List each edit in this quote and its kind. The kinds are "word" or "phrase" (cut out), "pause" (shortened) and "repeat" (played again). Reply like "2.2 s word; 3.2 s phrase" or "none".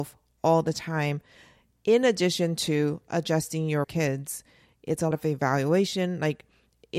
3.8 s phrase; 5.1 s word